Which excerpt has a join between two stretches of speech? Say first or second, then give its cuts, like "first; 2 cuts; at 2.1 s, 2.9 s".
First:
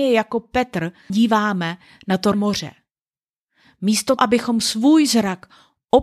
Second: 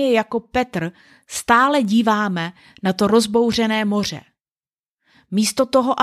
first; 3 cuts; at 1.1 s, 2.3 s, 4.2 s